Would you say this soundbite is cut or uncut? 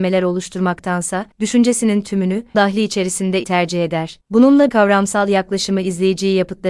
cut